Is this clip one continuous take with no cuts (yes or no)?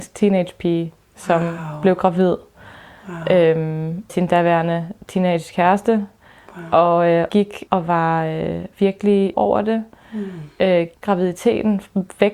no